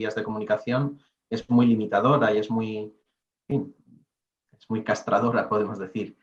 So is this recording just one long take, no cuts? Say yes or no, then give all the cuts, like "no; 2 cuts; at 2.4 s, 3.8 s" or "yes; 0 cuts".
yes; 0 cuts